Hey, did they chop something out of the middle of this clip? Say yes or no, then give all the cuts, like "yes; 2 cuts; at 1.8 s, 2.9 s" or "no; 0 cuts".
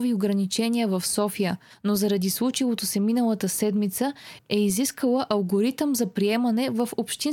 no; 0 cuts